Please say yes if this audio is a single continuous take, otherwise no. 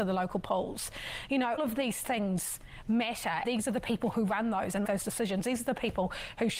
no